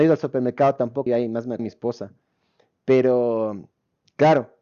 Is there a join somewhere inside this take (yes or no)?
yes